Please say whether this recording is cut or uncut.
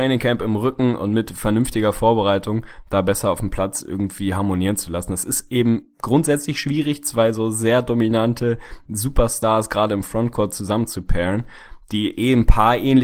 uncut